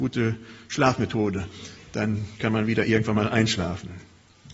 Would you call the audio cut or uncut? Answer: uncut